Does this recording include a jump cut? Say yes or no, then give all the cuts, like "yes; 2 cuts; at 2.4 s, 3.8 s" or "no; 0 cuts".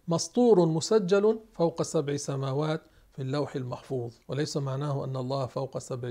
yes; 1 cut; at 4.2 s